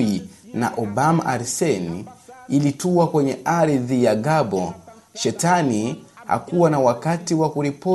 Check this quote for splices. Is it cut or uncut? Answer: uncut